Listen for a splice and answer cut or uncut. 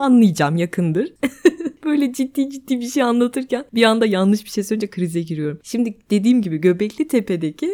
uncut